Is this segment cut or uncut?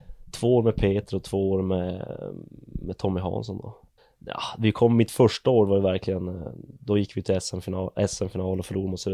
cut